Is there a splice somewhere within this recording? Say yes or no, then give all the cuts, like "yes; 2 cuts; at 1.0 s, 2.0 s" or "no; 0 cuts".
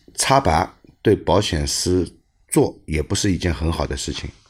no; 0 cuts